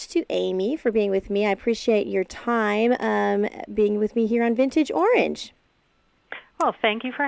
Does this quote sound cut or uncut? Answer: uncut